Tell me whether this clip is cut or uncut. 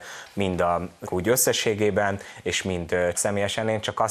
cut